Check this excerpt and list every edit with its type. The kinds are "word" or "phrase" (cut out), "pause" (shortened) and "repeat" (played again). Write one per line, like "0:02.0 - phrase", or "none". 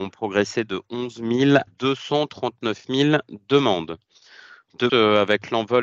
0:01.7 - word
0:04.9 - word